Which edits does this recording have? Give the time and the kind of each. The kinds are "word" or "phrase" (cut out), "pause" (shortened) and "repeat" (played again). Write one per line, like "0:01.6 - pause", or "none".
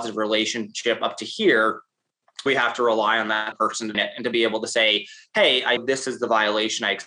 0:02.5 - word
0:03.5 - word
0:03.9 - word
0:05.8 - word